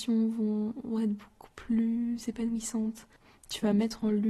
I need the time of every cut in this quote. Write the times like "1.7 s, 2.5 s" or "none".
none

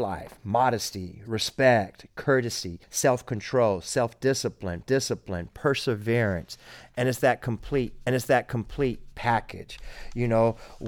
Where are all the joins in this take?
2.8 s, 4.8 s, 8.1 s

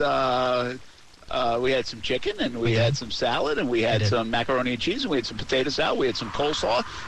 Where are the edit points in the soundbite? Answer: none

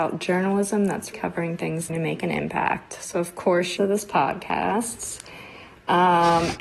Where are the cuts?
1.1 s, 1.9 s, 3.8 s

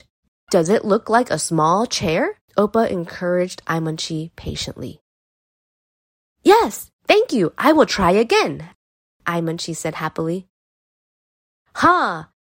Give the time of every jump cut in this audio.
2.5 s

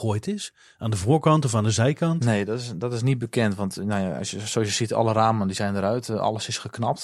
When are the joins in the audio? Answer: none

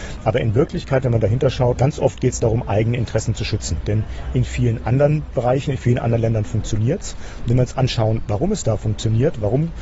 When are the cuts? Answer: 1.8 s

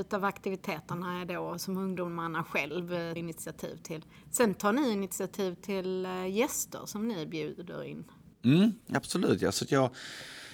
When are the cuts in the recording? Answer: 3.2 s

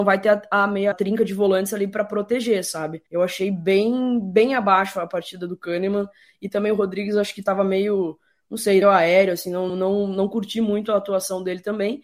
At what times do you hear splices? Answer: 0.9 s, 3.1 s, 8.8 s, 9.7 s

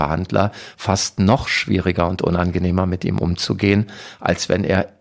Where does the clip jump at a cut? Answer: none

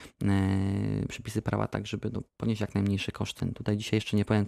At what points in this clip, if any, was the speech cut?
none

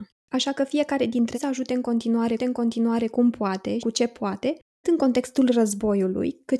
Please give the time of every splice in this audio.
1.3 s, 2.4 s, 3.8 s, 4.8 s

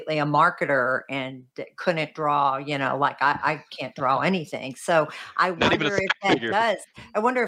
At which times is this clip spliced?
none

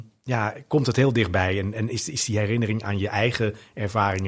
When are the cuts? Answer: none

